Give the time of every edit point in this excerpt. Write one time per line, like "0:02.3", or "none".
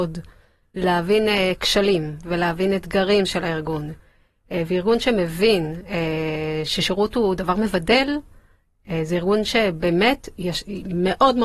none